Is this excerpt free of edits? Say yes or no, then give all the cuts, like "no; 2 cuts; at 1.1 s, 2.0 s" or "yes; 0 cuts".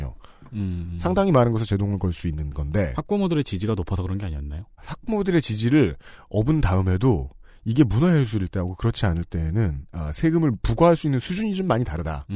yes; 0 cuts